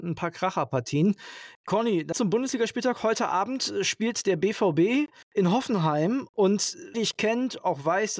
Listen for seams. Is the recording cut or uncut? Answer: cut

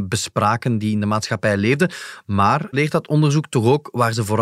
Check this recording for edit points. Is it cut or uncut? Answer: cut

